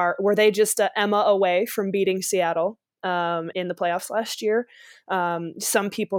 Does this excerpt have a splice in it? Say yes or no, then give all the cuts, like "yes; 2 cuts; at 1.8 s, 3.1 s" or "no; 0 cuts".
yes; 1 cut; at 3.5 s